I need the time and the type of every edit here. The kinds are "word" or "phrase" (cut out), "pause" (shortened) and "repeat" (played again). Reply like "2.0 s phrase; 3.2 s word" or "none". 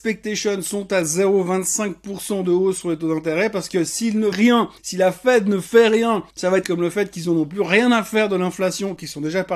4.3 s word; 4.8 s pause; 6.3 s pause; 6.6 s word